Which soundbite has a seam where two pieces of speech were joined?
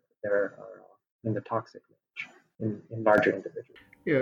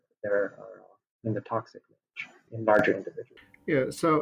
second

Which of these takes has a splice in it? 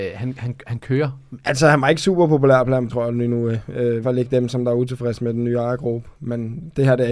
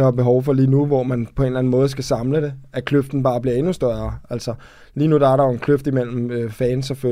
first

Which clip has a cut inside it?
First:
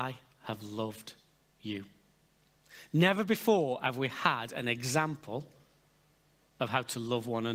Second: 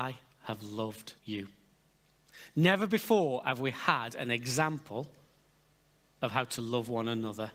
second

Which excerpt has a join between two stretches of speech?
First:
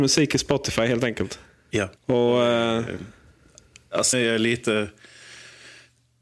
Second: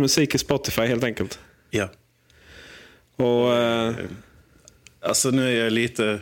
first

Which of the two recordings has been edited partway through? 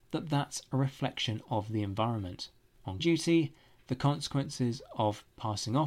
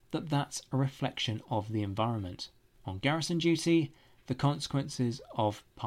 first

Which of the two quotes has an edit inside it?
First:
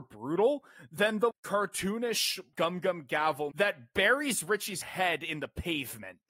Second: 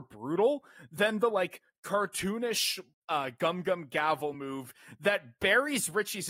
first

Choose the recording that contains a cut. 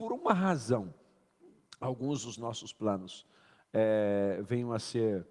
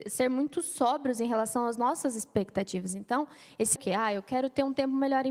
second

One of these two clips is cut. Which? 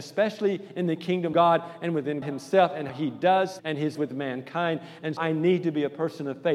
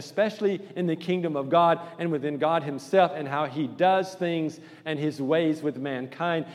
first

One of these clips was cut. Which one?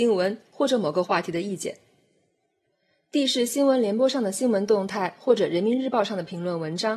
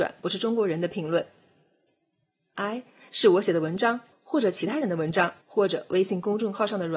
second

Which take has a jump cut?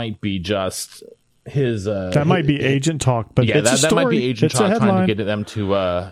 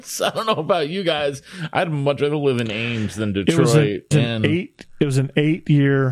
second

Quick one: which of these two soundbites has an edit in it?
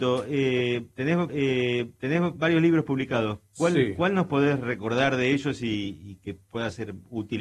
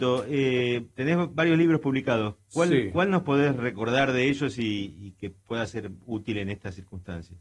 first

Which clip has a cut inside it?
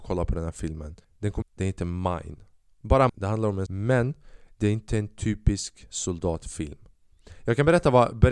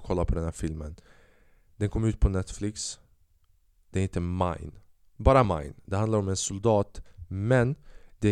first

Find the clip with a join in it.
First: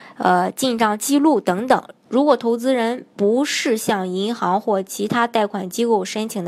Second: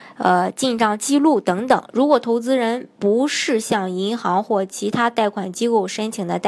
second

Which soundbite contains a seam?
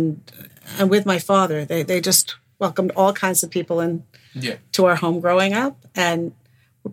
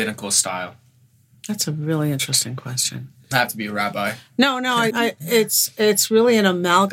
second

